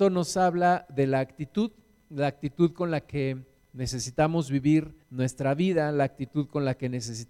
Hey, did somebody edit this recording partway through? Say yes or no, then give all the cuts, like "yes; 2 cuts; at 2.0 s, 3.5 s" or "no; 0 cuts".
yes; 1 cut; at 5.0 s